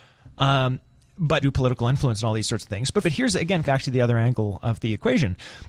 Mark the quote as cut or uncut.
cut